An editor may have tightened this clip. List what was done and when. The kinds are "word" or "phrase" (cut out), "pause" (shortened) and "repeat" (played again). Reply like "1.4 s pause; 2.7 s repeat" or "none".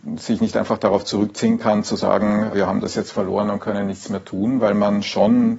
2.5 s word